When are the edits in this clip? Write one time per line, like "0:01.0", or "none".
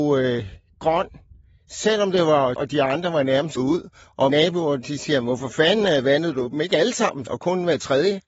0:02.6
0:03.6
0:04.3
0:07.3